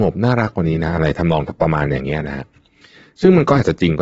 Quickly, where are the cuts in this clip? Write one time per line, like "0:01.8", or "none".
none